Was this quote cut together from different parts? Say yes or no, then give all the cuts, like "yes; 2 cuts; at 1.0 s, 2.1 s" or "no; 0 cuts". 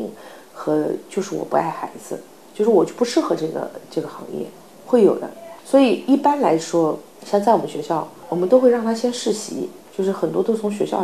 no; 0 cuts